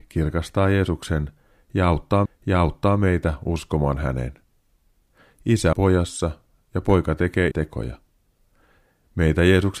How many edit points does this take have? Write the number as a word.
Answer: three